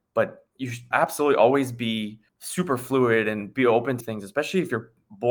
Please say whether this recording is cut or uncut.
cut